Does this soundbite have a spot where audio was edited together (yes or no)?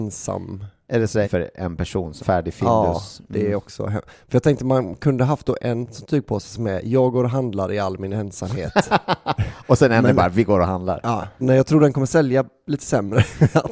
yes